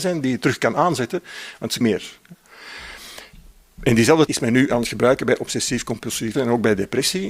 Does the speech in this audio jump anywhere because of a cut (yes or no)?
yes